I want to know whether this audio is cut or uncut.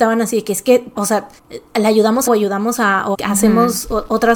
cut